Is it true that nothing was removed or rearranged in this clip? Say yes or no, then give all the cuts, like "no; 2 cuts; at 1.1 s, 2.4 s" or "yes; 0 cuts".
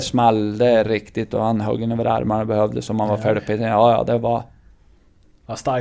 yes; 0 cuts